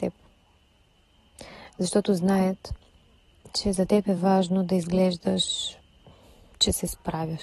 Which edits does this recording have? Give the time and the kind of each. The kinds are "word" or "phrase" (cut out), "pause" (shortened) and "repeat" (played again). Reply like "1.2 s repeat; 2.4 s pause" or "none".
none